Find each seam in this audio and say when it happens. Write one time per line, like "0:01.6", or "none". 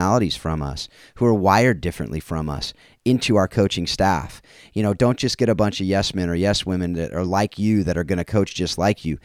none